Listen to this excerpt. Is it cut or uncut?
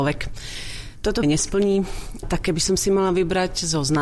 cut